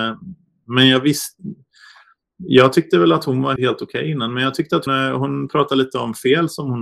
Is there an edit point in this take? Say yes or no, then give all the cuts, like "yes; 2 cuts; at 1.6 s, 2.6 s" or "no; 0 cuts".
yes; 2 cuts; at 3.6 s, 4.9 s